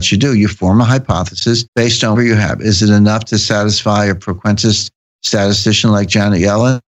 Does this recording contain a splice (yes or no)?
yes